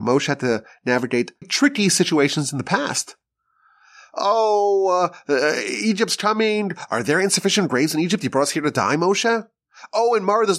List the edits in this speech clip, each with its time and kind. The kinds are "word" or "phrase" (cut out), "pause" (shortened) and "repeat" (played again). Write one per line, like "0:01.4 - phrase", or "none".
0:01.4 - word